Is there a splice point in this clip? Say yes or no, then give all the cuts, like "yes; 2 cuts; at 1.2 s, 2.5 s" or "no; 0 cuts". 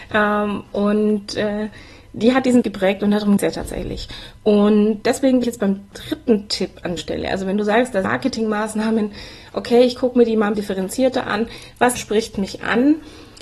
yes; 9 cuts; at 2.6 s, 3.4 s, 5.0 s, 5.4 s, 5.9 s, 7.0 s, 8.0 s, 10.5 s, 12.0 s